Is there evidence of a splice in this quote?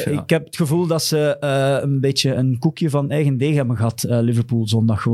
no; 0 cuts

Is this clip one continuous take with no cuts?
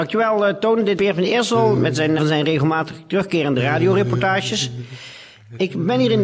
no; 2 cuts; at 1.0 s, 2.2 s

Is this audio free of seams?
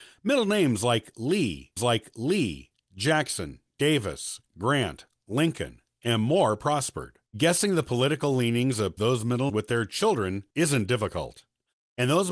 no; 5 cuts; at 1.8 s, 7.3 s, 9.0 s, 9.5 s, 10.5 s

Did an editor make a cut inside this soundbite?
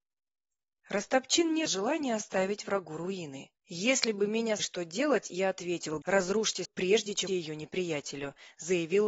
yes; 6 cuts; at 1.7 s, 3.6 s, 4.6 s, 6.0 s, 6.6 s, 7.3 s

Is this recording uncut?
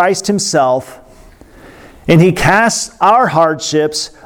yes; 0 cuts

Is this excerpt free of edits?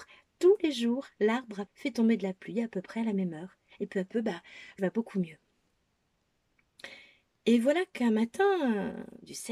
no; 2 cuts; at 1.7 s, 4.8 s

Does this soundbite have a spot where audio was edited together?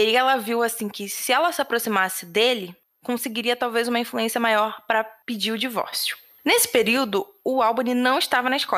no; 0 cuts

